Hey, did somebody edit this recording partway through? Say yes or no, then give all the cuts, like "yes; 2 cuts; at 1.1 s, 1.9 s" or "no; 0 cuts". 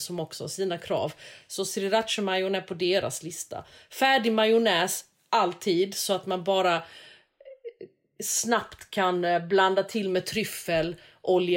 no; 0 cuts